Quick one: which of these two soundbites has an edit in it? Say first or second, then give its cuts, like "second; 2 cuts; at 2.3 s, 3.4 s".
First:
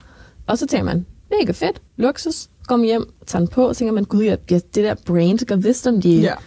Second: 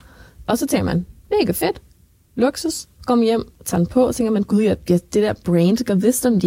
first; 1 cut; at 1.9 s